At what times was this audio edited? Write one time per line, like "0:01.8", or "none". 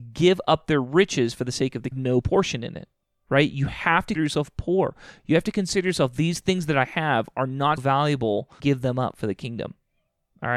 0:01.9
0:03.0
0:04.2
0:07.8
0:08.6

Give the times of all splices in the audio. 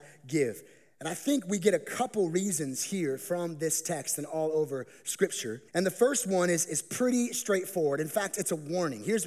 0:05.7

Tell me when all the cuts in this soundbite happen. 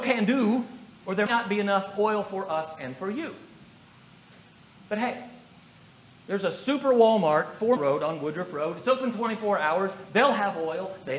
0:00.9
0:01.3
0:07.8

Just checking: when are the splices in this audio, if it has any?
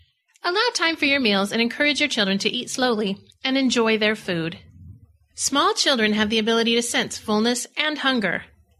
none

